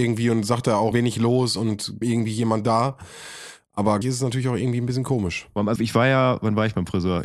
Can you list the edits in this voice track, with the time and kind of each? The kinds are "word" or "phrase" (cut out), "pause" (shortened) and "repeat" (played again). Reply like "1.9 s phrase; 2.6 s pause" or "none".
0.9 s word; 2.0 s word; 4.0 s word; 5.8 s word